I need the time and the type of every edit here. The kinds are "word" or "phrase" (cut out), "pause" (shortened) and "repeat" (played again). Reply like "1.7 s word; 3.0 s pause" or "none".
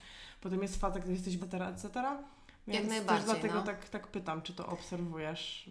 1.4 s phrase